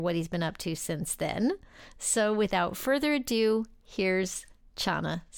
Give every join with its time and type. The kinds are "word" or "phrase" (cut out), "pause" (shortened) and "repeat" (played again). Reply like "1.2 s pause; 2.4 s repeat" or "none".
none